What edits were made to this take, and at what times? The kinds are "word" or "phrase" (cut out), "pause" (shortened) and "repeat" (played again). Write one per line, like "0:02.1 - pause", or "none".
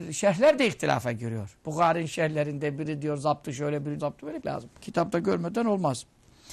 0:01.6 - pause
0:04.0 - word
0:04.4 - word
0:04.8 - pause